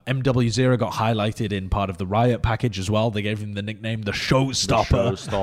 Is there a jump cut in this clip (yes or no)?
no